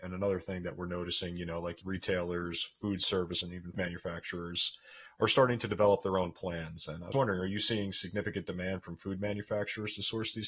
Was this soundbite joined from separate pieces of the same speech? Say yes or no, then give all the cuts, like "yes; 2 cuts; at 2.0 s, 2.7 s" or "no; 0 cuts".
yes; 4 cuts; at 1.8 s, 3.4 s, 3.7 s, 7.1 s